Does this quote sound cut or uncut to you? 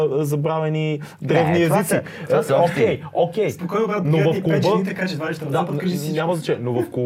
uncut